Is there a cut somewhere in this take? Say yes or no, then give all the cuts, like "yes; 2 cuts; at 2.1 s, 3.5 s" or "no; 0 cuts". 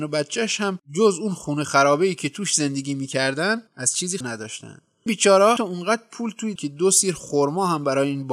yes; 5 cuts; at 3.7 s, 4.2 s, 5.1 s, 5.6 s, 6.6 s